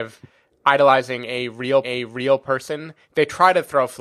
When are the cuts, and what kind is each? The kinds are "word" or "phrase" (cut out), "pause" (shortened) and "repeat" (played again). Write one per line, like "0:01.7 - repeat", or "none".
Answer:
0:01.8 - repeat